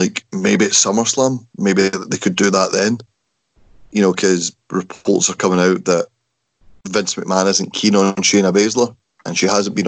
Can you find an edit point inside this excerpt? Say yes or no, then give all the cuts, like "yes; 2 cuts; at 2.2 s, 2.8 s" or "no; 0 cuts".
no; 0 cuts